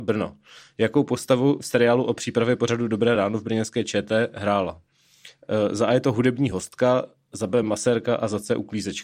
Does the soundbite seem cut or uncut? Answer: uncut